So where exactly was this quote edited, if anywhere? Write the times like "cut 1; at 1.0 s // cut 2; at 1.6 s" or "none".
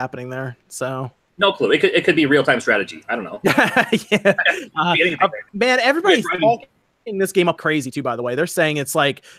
cut 1; at 5.5 s // cut 2; at 7.6 s